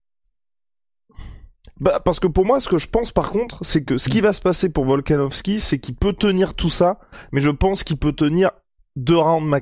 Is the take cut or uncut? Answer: uncut